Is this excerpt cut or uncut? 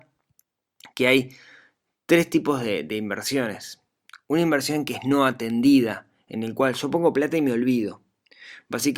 uncut